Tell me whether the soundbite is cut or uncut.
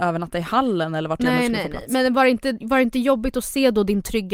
uncut